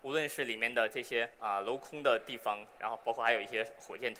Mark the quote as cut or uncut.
cut